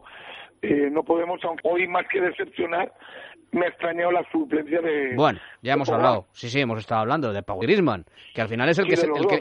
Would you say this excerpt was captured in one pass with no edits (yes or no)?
no